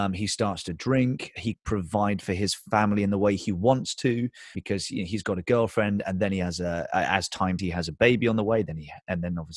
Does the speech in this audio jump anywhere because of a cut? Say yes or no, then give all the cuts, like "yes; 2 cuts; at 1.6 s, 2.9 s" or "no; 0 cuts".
yes; 3 cuts; at 1.5 s, 4.5 s, 7.6 s